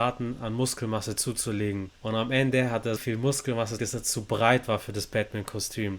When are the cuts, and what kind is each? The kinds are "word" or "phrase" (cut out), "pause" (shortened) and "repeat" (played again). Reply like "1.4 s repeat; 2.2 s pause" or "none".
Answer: 3.0 s word; 3.8 s word